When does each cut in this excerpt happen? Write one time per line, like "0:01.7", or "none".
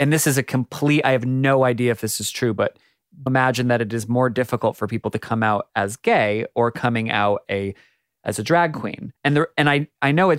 0:03.3
0:07.4
0:09.2